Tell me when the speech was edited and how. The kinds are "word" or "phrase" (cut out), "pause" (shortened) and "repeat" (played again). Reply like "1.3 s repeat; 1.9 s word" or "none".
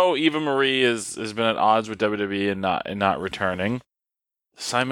none